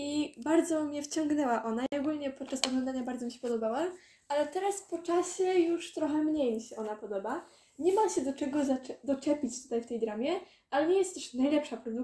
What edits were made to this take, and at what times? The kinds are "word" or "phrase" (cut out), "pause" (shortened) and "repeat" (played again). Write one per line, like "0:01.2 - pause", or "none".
none